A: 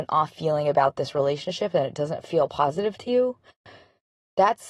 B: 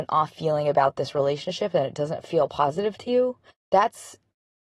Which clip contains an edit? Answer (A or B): B